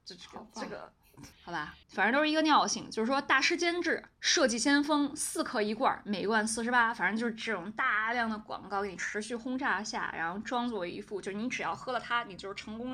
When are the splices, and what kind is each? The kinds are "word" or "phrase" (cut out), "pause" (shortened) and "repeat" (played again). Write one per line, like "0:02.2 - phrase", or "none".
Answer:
0:01.3 - pause
0:01.8 - pause
0:04.1 - pause